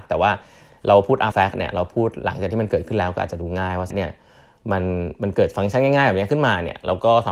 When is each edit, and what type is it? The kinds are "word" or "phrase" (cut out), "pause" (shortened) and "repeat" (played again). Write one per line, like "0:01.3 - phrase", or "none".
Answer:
0:01.3 - phrase
0:03.9 - word